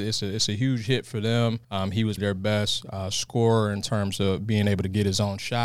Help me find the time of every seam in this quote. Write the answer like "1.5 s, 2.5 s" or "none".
1.6 s, 2.2 s

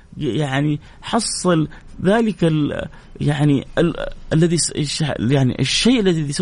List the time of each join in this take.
none

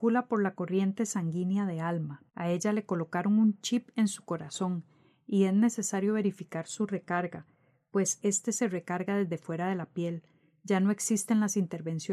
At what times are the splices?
2.3 s

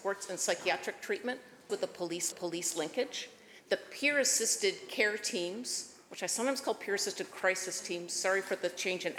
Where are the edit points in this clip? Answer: 1.7 s, 2.3 s

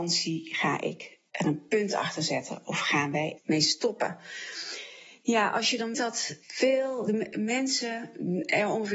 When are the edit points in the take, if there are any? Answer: 3.4 s, 5.9 s, 6.4 s

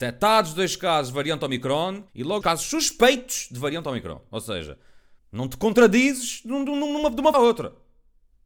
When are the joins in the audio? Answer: 2.1 s, 2.4 s, 5.2 s, 7.3 s

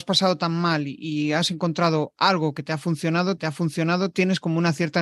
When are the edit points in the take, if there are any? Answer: 3.4 s

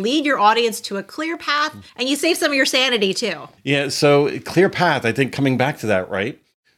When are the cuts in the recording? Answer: 1.9 s, 3.6 s

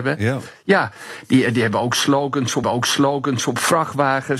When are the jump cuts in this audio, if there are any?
2.6 s

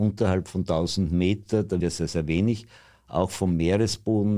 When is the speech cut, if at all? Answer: 1.8 s

